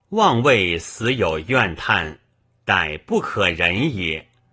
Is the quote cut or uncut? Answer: uncut